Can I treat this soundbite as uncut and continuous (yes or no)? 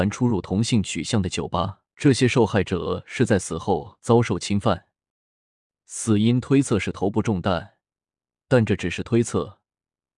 no